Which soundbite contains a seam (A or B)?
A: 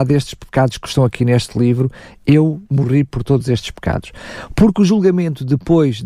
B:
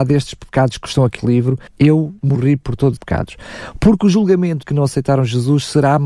B